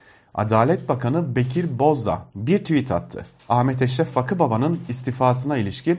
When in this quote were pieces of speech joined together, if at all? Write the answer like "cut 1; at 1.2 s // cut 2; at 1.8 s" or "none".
cut 1; at 2.3 s